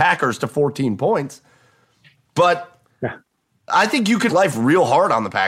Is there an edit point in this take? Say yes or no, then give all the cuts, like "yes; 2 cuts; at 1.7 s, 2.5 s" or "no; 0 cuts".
yes; 1 cut; at 4.3 s